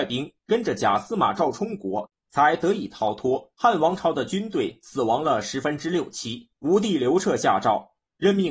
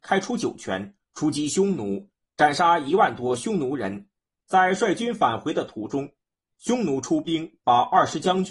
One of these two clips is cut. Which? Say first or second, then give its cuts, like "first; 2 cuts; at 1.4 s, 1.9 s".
first; 2 cuts; at 3.5 s, 6.5 s